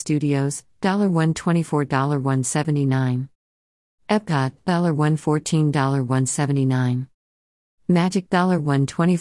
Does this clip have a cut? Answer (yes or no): yes